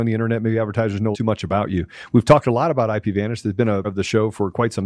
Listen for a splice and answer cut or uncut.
cut